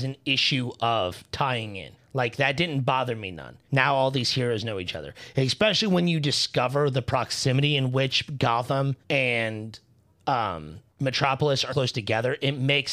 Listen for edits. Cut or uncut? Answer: cut